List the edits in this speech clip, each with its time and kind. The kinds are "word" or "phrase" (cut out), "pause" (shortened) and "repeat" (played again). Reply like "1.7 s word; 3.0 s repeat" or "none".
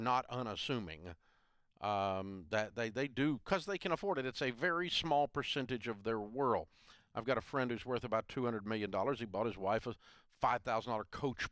none